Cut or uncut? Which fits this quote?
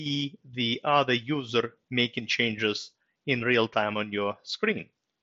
uncut